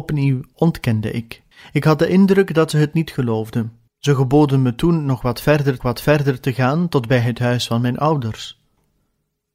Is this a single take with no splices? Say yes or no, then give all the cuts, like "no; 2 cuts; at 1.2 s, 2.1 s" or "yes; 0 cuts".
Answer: no; 3 cuts; at 1.5 s, 3.9 s, 5.8 s